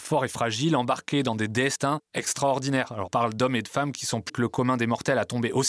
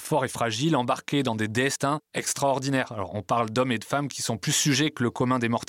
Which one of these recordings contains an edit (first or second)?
first